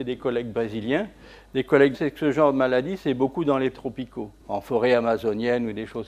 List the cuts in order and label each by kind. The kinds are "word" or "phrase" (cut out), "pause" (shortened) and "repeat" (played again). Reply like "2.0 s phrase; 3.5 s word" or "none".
1.9 s word; 3.7 s word; 4.4 s pause